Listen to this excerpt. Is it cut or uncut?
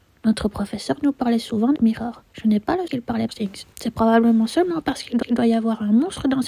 cut